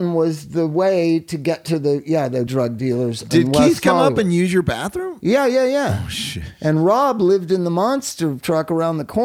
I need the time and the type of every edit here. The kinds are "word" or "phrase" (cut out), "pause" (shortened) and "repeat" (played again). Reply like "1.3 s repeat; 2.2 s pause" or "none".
2.5 s word

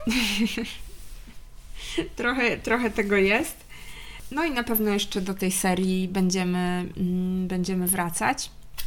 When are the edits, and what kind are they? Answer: none

